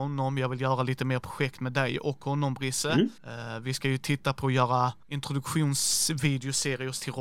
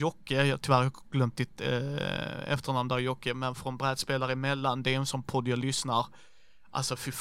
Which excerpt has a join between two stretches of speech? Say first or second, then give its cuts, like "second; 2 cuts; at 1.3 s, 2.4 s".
first; 2 cuts; at 3.2 s, 5.0 s